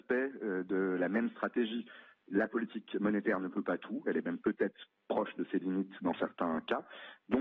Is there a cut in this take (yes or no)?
no